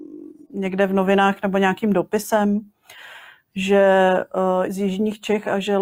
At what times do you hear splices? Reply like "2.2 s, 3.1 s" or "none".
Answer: 4.6 s